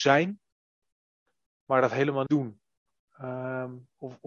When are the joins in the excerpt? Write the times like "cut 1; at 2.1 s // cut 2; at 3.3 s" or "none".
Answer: cut 1; at 1.6 s // cut 2; at 2.3 s

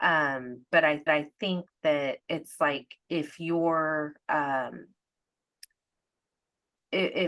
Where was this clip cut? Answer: cut 1; at 1.1 s // cut 2; at 2.2 s // cut 3; at 3.0 s

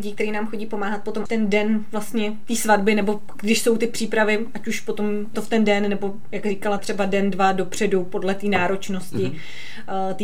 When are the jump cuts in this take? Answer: cut 1; at 1.3 s // cut 2; at 5.3 s // cut 3; at 6.8 s

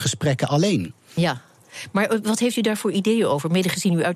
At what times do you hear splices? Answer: none

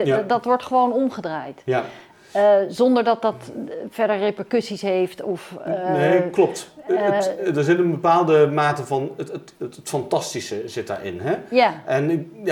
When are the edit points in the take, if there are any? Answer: none

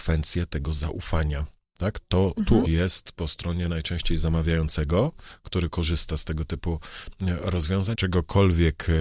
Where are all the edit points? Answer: cut 1; at 2.6 s // cut 2; at 7.9 s

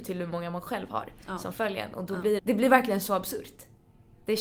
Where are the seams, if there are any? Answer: cut 1; at 2.4 s

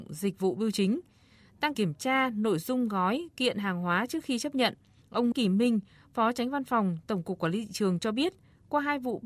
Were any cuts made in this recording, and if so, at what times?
cut 1; at 1.7 s // cut 2; at 5.3 s

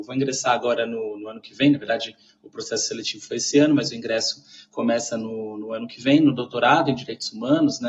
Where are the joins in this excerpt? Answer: none

